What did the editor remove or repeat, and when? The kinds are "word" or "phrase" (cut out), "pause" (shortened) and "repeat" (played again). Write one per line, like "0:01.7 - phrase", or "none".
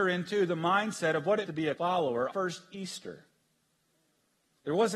0:01.5 - word
0:01.8 - word
0:02.3 - phrase